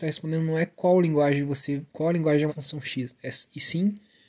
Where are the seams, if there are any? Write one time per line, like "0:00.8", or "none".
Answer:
0:01.9
0:02.5

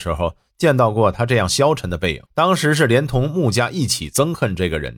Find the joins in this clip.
0:02.3

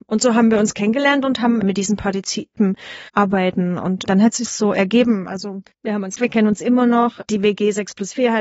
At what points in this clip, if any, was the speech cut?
0:01.6
0:02.6
0:03.1
0:04.5
0:05.7
0:06.2

